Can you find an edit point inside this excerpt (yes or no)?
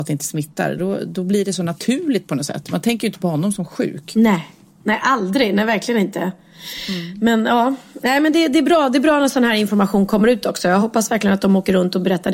no